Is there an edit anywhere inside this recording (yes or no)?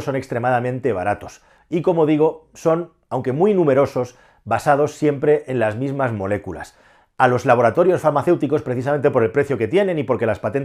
no